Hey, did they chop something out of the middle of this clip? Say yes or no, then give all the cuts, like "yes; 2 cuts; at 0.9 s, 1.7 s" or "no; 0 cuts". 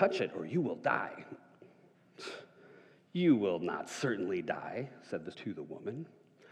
yes; 1 cut; at 5.3 s